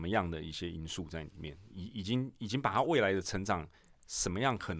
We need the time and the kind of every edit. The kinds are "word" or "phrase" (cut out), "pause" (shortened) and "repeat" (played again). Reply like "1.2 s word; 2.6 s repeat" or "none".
none